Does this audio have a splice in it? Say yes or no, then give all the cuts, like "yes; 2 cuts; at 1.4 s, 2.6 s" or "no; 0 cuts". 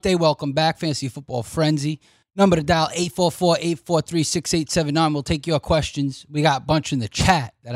no; 0 cuts